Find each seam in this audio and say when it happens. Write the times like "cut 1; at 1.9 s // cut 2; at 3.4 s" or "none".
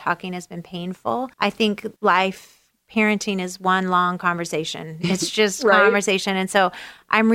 cut 1; at 1.3 s // cut 2; at 2.0 s